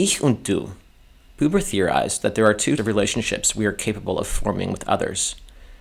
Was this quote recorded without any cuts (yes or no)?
no